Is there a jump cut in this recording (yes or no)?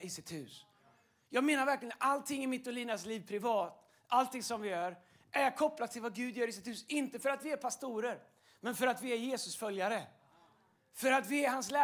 no